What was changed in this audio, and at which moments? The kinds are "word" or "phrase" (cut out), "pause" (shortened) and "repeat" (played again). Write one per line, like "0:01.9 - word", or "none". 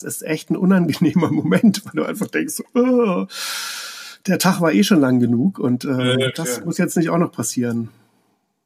none

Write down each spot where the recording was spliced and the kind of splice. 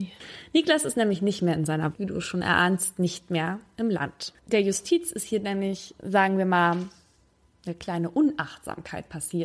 0:01.9 - phrase
0:04.4 - pause

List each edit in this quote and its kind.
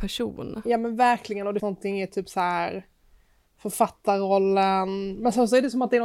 0:01.6 - word

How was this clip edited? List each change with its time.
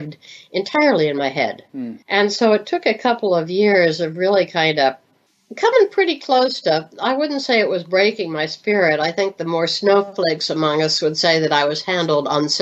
0:02.0 - pause
0:05.3 - pause

